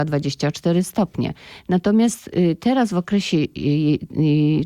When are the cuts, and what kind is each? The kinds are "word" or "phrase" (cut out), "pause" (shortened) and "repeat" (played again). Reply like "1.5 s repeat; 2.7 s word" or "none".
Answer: none